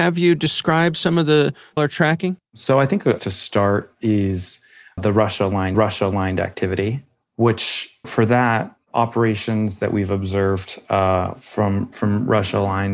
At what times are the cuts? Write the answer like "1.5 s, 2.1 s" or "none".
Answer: 1.8 s, 2.4 s, 3.2 s, 5.0 s, 5.7 s, 8.0 s